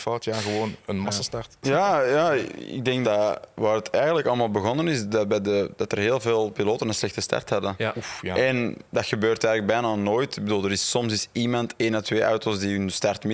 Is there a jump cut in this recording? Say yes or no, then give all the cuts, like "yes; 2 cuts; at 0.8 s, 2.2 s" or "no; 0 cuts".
yes; 1 cut; at 3.0 s